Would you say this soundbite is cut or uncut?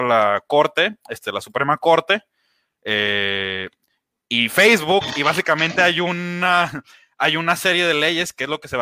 uncut